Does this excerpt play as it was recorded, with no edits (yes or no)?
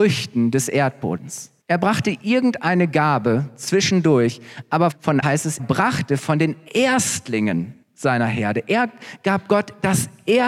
no